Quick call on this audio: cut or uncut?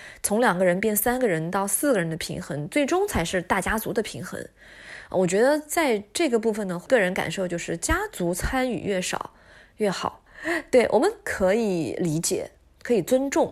uncut